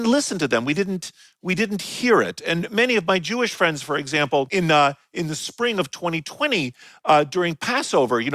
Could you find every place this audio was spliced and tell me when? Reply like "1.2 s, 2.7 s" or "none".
none